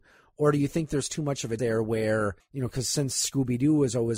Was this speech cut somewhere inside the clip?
yes; 2 cuts; at 1.6 s, 2.4 s

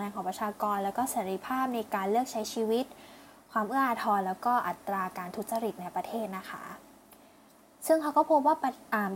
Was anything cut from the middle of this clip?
no; 0 cuts

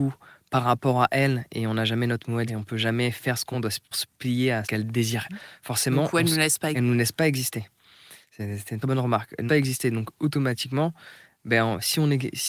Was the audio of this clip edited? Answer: yes; 8 cuts; at 2.5 s, 3.5 s, 3.9 s, 4.6 s, 5.3 s, 6.7 s, 8.8 s, 9.5 s

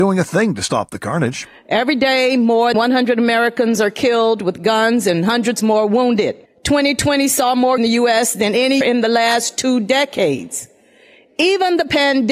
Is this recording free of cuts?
no; 4 cuts; at 2.7 s, 6.5 s, 7.8 s, 8.8 s

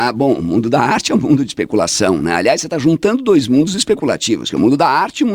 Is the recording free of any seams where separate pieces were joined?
yes; 0 cuts

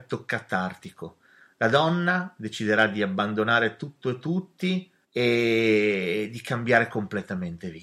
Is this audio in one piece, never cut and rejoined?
yes; 0 cuts

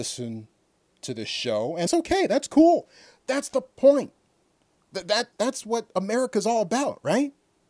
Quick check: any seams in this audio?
yes; 2 cuts; at 1.9 s, 5.3 s

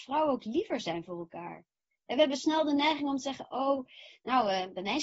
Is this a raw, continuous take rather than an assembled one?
yes; 0 cuts

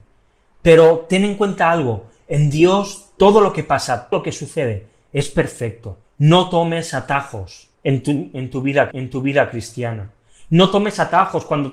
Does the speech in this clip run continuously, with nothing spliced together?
no; 4 cuts; at 4.1 s, 6.0 s, 7.7 s, 8.9 s

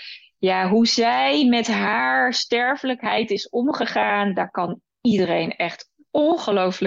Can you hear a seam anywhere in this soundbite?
no; 0 cuts

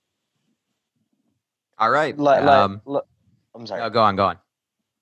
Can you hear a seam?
no; 0 cuts

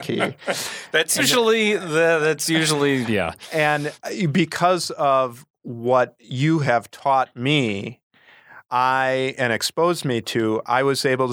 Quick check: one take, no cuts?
no; 3 cuts; at 1.2 s, 3.1 s, 8.6 s

